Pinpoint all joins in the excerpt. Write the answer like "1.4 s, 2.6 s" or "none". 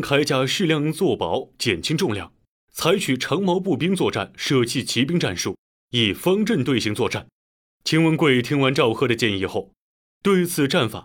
2.5 s, 5.8 s